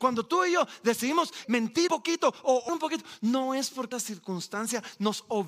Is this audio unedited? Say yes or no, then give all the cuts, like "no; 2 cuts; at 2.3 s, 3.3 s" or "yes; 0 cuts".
no; 4 cuts; at 1.4 s, 1.9 s, 2.7 s, 3.9 s